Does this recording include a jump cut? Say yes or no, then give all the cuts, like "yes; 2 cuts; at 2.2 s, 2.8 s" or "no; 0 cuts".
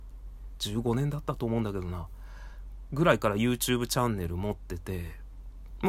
no; 0 cuts